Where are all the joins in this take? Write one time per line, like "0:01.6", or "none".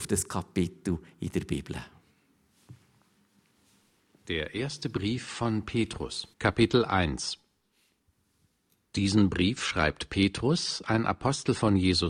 0:06.3